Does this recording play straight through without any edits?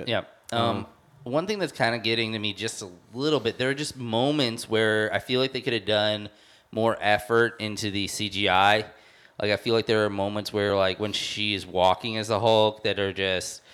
yes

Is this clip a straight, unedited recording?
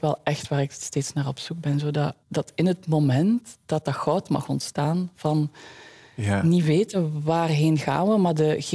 no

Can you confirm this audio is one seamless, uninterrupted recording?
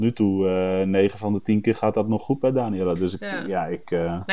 yes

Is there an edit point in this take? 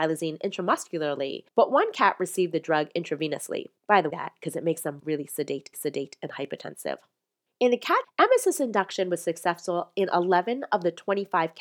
yes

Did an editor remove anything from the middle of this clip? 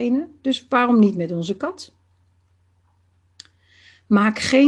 no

